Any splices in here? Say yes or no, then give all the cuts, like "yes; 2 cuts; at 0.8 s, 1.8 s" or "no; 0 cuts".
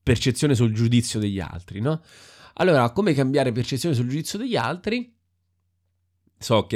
no; 0 cuts